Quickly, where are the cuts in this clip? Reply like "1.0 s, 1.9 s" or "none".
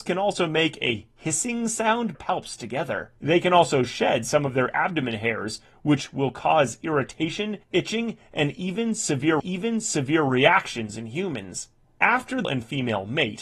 2.1 s, 3.2 s, 7.6 s, 9.4 s, 11.8 s, 12.4 s